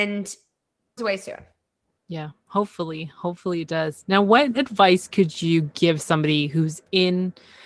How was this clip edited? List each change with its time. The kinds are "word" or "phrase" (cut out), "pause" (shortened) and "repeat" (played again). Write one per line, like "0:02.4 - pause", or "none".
0:01.0 - phrase